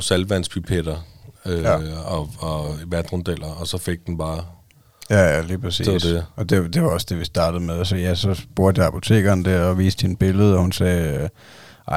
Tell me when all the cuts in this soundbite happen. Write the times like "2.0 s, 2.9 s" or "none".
1.4 s